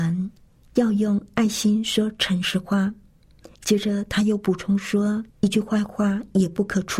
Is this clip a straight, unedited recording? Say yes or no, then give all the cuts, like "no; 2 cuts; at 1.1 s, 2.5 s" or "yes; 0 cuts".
no; 2 cuts; at 3.6 s, 5.3 s